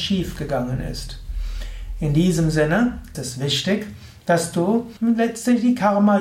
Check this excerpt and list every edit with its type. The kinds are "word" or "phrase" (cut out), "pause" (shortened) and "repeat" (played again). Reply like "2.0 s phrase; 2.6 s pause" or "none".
3.1 s word; 5.0 s pause